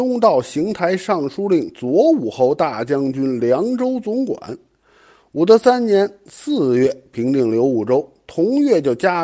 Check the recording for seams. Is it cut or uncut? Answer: uncut